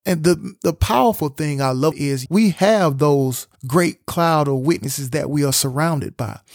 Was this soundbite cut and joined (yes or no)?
yes